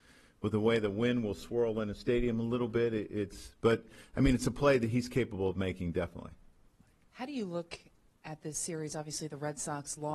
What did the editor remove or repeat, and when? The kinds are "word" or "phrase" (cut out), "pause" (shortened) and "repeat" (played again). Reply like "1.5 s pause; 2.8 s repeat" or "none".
none